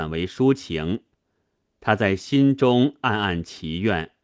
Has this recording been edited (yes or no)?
no